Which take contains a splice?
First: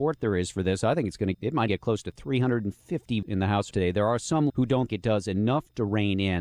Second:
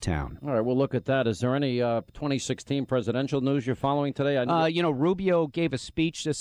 first; 6 cuts; at 1.3 s, 1.7 s, 3.2 s, 3.7 s, 4.5 s, 4.9 s

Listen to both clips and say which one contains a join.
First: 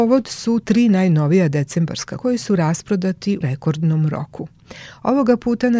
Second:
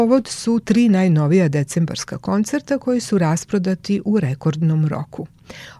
first; 2 cuts; at 2.2 s, 3.4 s

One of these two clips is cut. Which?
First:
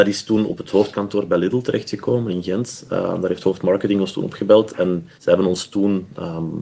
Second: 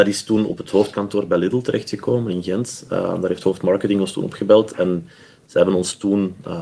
first; 1 cut; at 5.1 s

